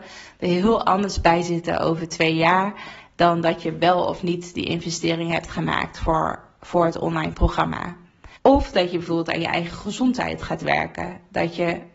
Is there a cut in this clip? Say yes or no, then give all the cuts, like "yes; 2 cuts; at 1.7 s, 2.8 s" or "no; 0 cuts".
yes; 1 cut; at 8.4 s